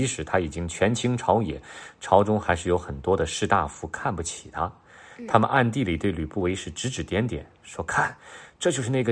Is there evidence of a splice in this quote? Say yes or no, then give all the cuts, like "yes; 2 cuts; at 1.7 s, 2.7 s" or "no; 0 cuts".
no; 0 cuts